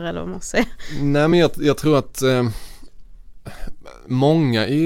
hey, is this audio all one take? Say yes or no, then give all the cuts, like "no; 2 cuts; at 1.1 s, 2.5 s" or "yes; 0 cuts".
yes; 0 cuts